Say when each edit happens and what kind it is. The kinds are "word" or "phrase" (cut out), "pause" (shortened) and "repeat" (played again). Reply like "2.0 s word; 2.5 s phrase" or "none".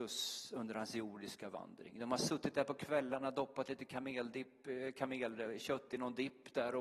none